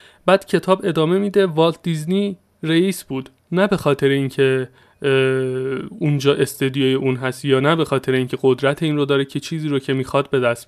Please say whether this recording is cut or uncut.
uncut